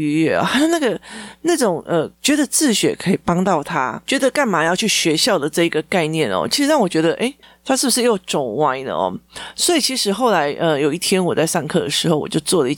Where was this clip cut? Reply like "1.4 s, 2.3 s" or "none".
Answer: 2.1 s, 7.4 s